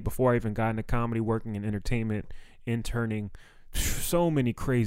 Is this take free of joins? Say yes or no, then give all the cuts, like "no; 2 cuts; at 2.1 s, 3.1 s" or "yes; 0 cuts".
yes; 0 cuts